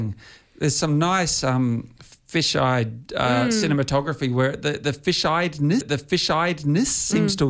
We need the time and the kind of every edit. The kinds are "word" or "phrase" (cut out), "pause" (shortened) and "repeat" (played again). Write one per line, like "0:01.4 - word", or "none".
0:05.8 - repeat